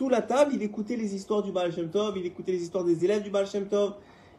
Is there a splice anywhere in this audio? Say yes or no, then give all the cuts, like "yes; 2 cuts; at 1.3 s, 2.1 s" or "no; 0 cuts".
no; 0 cuts